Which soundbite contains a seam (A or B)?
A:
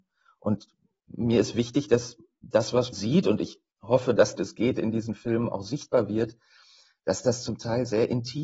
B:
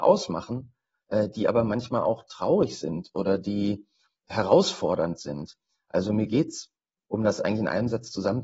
A